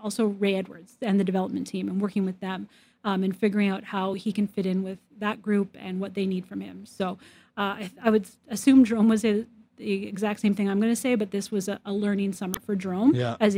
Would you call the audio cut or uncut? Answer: uncut